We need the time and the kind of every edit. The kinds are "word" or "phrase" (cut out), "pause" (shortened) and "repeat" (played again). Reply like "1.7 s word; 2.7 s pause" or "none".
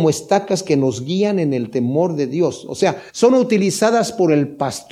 3.1 s pause